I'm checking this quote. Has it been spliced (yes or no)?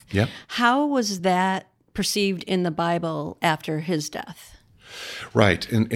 no